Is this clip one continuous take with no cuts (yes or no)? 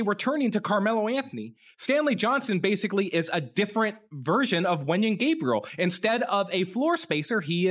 yes